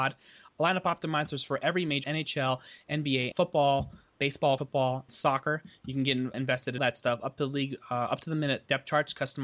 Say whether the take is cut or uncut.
cut